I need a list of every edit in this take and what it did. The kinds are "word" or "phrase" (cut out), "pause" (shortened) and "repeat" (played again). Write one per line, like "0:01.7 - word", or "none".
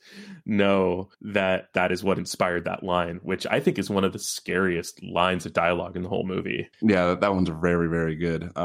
0:01.1 - pause
0:06.7 - pause